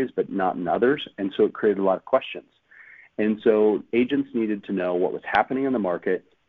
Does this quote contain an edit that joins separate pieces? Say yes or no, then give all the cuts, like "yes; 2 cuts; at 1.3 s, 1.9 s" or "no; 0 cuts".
no; 0 cuts